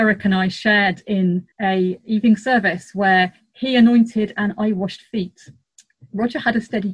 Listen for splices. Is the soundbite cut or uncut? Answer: cut